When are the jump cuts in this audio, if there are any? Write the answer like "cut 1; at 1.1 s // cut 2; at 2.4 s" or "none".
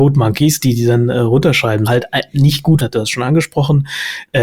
cut 1; at 1.9 s // cut 2; at 2.8 s